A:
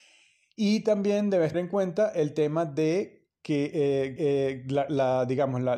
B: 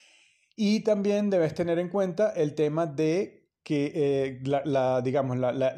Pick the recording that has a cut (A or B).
A